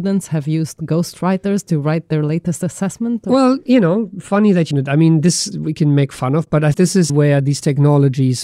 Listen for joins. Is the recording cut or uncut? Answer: cut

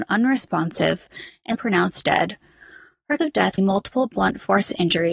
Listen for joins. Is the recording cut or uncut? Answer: cut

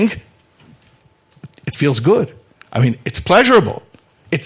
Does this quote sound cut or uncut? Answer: uncut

